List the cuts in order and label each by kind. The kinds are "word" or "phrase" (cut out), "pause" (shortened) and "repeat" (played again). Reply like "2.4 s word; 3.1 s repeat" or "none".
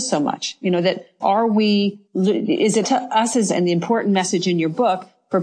1.2 s word; 2.0 s pause; 2.8 s word; 3.5 s word